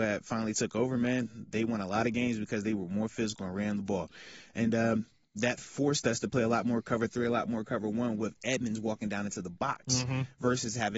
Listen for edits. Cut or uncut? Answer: uncut